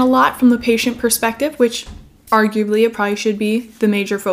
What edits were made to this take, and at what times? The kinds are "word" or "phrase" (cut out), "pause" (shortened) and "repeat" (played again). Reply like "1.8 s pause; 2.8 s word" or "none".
none

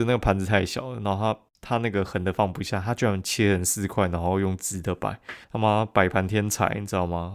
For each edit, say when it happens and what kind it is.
1.5 s pause; 5.4 s pause

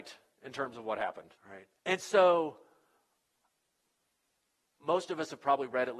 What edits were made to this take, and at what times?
1.4 s pause; 1.8 s pause

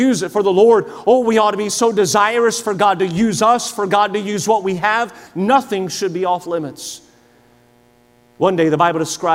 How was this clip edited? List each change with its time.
none

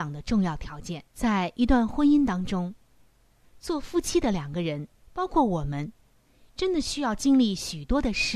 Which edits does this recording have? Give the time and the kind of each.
1.1 s pause; 5.0 s pause

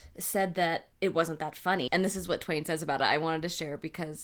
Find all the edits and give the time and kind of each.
0.9 s pause; 1.9 s word

